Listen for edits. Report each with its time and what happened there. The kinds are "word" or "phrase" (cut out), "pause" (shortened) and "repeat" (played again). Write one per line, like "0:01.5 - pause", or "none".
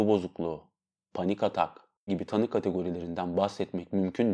0:02.1 - word